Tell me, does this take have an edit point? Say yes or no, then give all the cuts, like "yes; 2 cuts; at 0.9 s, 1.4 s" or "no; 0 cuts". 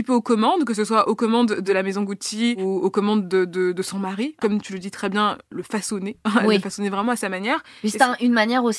no; 0 cuts